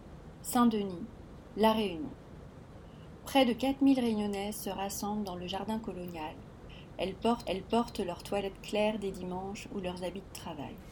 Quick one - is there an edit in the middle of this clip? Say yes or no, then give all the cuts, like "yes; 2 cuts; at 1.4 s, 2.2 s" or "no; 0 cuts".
yes; 1 cut; at 7.4 s